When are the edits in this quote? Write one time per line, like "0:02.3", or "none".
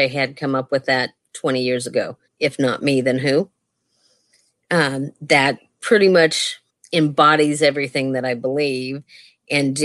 0:02.3
0:06.7